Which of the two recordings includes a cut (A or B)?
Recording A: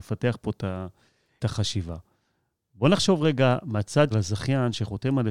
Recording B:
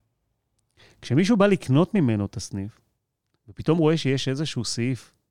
A